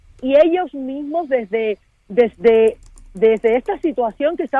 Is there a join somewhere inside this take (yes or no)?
no